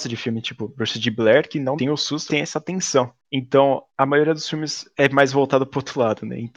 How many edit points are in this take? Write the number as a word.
two